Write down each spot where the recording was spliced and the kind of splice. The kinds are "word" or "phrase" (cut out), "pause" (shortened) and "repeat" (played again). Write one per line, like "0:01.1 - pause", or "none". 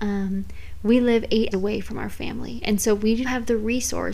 0:01.5 - word
0:03.2 - word